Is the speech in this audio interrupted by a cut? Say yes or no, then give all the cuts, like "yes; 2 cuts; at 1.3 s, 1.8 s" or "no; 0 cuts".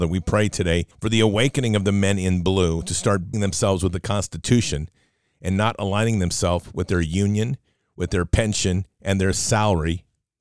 yes; 2 cuts; at 0.9 s, 3.3 s